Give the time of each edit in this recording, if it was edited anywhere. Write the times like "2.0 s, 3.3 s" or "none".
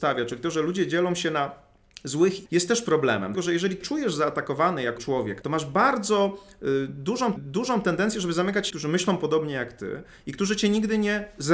2.5 s, 3.3 s, 3.8 s, 5.0 s, 5.4 s, 7.4 s, 8.7 s